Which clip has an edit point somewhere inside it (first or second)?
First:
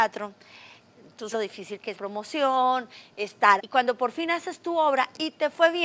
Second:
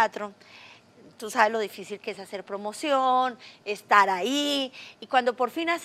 first